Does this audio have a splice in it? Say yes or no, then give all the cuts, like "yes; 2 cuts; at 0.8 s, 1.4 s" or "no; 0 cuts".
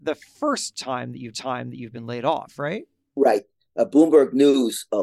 yes; 1 cut; at 1.3 s